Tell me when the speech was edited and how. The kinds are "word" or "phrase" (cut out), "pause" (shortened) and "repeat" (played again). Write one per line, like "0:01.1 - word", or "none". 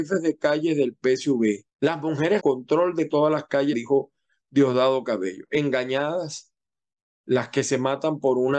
0:01.7 - pause
0:02.4 - phrase
0:03.1 - word
0:03.7 - phrase